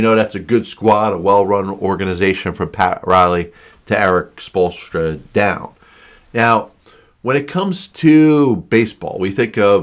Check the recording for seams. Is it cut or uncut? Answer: uncut